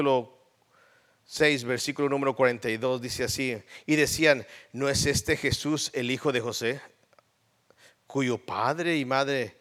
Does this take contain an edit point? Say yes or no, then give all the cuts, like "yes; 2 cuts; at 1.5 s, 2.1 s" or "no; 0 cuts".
no; 0 cuts